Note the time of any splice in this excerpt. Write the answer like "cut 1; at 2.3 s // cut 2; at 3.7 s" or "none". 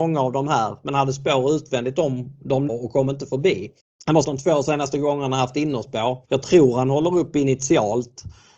cut 1; at 2.7 s // cut 2; at 3.8 s // cut 3; at 4.2 s // cut 4; at 6.3 s